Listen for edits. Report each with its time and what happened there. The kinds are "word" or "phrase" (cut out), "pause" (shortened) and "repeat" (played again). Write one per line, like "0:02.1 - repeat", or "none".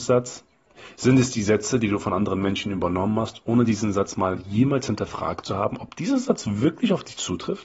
none